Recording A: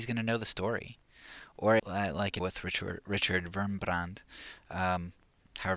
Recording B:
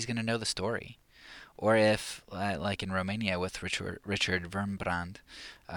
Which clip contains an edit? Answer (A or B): A